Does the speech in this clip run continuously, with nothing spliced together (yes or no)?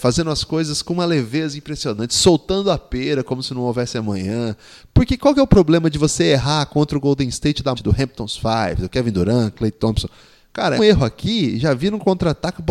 no